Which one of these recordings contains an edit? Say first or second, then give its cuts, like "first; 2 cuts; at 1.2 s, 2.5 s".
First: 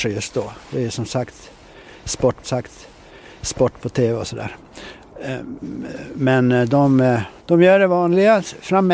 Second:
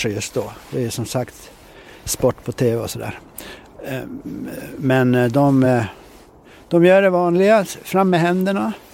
first; 2 cuts; at 2.4 s, 7.4 s